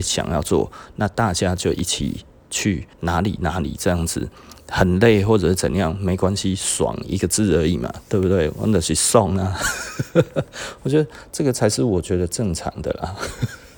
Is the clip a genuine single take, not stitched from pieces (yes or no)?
no